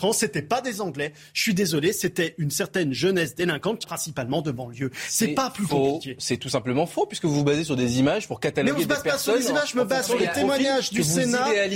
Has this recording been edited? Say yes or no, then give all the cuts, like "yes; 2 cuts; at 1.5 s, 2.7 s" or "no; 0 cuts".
yes; 1 cut; at 3.8 s